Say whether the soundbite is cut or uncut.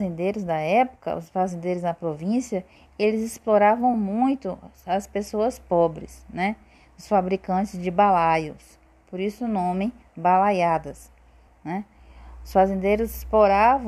uncut